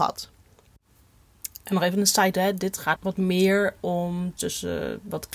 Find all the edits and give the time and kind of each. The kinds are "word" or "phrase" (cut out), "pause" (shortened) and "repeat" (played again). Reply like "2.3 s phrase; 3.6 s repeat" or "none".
2.3 s word; 3.0 s word; 4.4 s word